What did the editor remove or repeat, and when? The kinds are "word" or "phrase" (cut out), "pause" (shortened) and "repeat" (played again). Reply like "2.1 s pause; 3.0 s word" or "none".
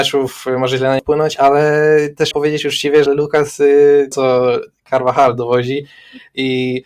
1.0 s word; 2.3 s word; 3.1 s word; 4.1 s phrase